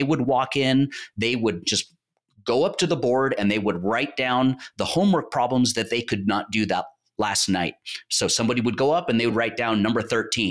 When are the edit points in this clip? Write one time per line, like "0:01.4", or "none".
none

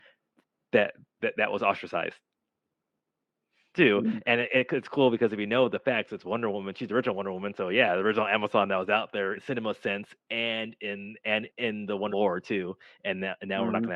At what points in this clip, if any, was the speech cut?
0:01.2
0:09.4
0:11.5
0:12.1

